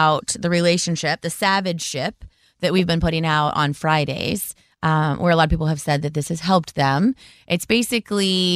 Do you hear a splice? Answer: no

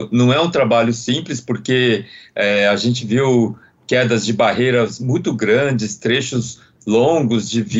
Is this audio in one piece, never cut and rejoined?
yes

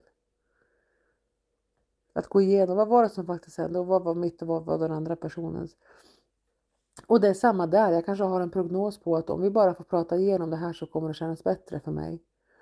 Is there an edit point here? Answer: no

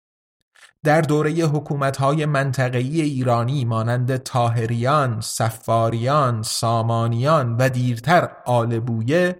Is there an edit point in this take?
no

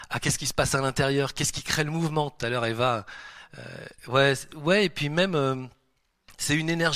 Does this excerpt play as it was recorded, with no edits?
yes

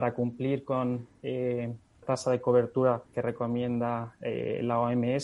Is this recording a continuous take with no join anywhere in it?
no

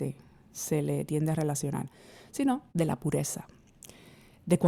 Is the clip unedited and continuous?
no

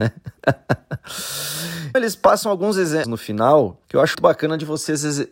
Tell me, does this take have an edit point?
yes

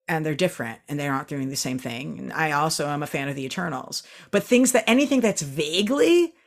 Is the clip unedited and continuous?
yes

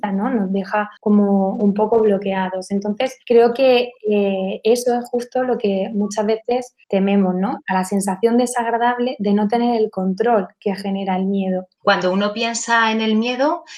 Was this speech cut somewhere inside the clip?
yes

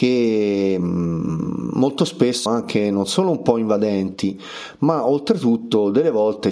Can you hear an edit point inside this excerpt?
yes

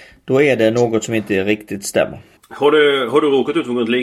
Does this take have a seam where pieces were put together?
yes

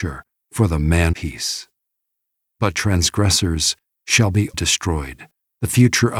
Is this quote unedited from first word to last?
no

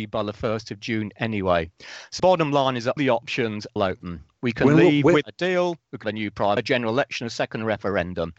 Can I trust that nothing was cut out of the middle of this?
no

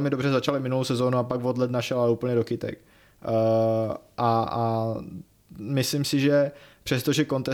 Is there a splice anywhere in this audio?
no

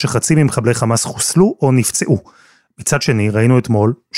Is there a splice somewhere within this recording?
no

